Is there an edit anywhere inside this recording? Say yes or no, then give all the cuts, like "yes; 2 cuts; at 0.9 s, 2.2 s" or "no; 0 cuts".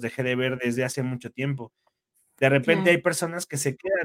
no; 0 cuts